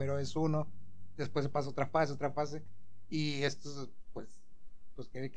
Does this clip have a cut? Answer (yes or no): no